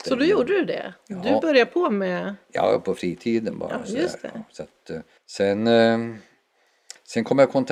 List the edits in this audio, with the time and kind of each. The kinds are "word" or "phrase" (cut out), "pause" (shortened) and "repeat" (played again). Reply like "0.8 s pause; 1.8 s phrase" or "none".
5.2 s pause